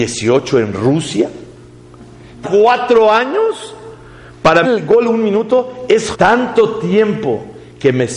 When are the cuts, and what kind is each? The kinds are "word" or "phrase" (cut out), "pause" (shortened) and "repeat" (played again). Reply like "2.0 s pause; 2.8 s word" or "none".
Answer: 2.4 s phrase; 4.6 s word; 6.1 s word